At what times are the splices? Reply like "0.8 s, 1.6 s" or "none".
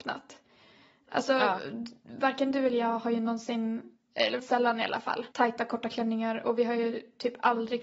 4.4 s, 5.3 s